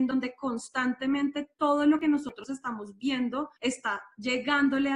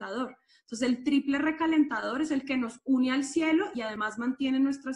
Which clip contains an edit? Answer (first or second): first